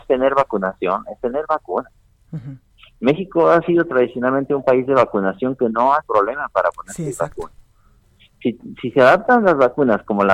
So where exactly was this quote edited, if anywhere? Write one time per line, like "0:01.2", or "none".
0:06.0